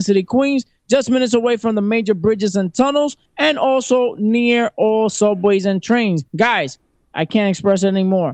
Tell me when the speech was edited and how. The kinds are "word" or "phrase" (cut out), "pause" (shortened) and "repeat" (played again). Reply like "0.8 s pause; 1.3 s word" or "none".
3.3 s pause; 6.3 s pause